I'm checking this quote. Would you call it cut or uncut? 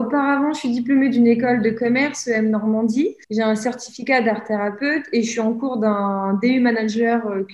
cut